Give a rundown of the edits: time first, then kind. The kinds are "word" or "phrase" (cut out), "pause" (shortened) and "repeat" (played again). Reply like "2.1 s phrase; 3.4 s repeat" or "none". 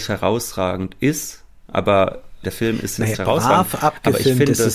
2.4 s word; 3.1 s word